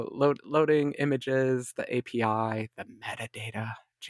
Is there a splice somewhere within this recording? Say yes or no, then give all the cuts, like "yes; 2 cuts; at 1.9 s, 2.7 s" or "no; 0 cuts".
no; 0 cuts